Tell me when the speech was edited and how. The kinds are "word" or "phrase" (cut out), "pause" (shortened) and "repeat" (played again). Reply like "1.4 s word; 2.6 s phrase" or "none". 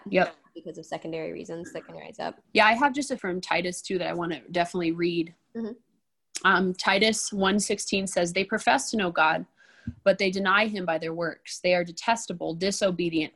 2.4 s pause; 3.2 s phrase